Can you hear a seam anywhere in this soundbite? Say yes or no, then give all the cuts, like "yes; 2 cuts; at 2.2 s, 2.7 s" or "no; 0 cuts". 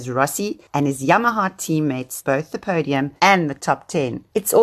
yes; 2 cuts; at 2.2 s, 3.2 s